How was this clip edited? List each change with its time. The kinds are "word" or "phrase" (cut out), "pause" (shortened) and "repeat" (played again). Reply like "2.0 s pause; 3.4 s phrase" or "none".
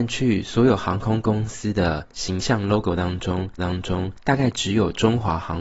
3.6 s repeat